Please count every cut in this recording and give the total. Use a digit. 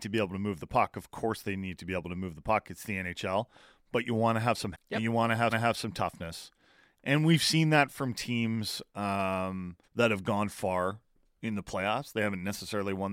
3